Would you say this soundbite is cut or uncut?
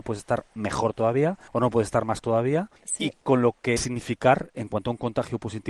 cut